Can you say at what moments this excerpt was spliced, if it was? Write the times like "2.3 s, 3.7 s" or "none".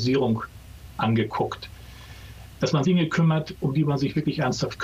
2.8 s